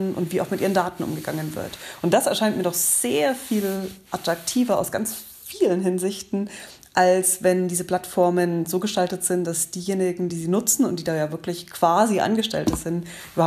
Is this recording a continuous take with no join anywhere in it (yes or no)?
yes